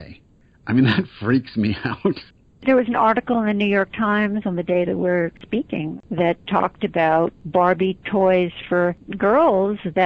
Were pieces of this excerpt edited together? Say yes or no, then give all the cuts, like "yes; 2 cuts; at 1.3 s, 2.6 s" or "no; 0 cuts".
no; 0 cuts